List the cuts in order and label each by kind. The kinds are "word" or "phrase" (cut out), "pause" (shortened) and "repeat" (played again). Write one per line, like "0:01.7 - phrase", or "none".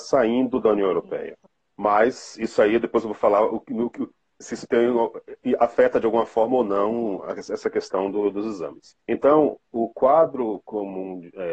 0:01.5 - pause
0:09.0 - pause